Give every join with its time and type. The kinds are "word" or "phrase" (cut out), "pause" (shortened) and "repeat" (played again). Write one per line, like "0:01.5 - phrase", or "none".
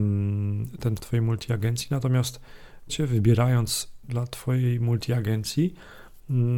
0:01.0 - word
0:02.9 - word
0:04.0 - word